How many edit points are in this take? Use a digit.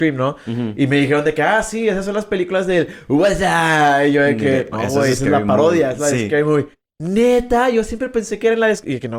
1